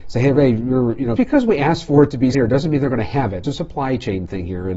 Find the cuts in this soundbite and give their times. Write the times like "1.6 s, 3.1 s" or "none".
1.2 s, 2.3 s, 3.4 s